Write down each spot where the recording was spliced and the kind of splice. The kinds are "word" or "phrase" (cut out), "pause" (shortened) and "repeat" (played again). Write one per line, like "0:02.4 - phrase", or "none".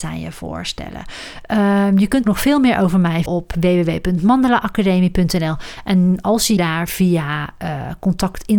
0:02.2 - word
0:03.3 - word
0:06.6 - word